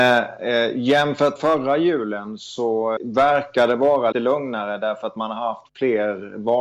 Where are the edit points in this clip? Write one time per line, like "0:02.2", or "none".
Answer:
0:01.4
0:03.0
0:04.1